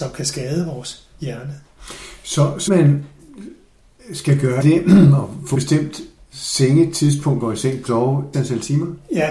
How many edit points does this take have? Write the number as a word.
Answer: six